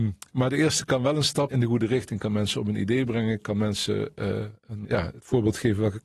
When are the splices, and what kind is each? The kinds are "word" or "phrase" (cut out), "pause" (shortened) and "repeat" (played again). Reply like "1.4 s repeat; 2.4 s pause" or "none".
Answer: 1.5 s phrase; 4.8 s word